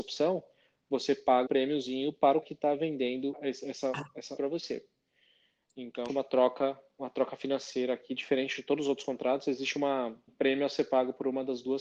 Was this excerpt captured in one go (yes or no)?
no